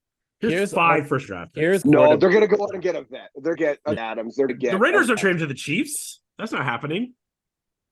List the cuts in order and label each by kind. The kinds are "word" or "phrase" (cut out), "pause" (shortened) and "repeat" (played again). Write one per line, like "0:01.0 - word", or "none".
0:01.3 - word
0:01.8 - word
0:03.5 - word
0:04.0 - word
0:04.5 - word
0:05.2 - word